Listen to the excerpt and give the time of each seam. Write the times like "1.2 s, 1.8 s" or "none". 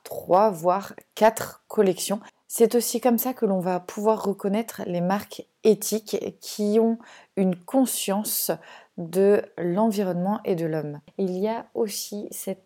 none